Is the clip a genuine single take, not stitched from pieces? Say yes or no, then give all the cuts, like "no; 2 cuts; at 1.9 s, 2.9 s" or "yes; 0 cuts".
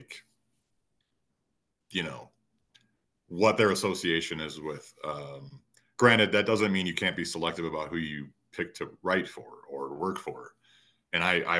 yes; 0 cuts